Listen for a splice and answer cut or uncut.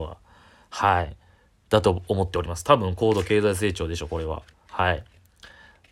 cut